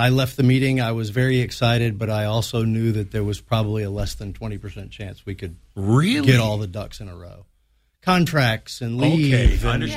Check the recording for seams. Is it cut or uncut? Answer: uncut